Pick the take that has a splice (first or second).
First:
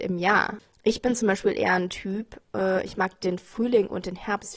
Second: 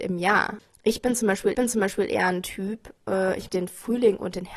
second